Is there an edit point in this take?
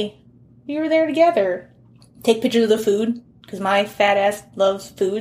no; 0 cuts

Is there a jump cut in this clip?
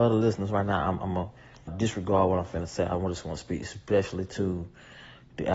yes; 1 cut; at 1.7 s

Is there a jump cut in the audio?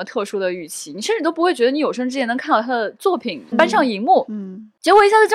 yes; 1 cut; at 3.5 s

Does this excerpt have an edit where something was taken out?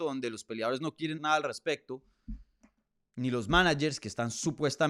yes; 1 cut; at 1.2 s

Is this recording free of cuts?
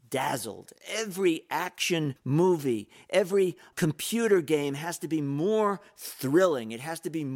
no; 2 cuts; at 2.2 s, 3.7 s

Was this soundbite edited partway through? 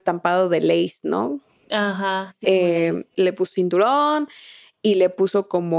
yes; 3 cuts; at 2.4 s, 3.1 s, 3.5 s

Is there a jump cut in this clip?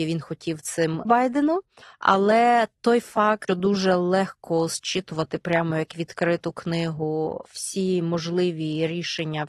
yes; 3 cuts; at 1.1 s, 1.8 s, 3.5 s

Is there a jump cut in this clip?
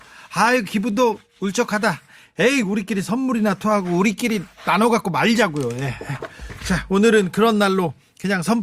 no; 0 cuts

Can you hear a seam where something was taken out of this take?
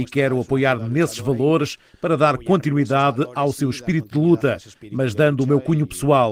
no; 0 cuts

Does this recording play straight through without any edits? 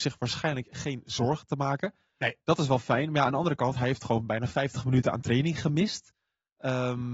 yes; 0 cuts

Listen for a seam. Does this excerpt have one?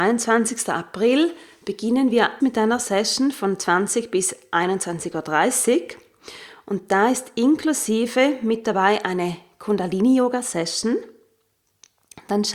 yes; 1 cut; at 2.4 s

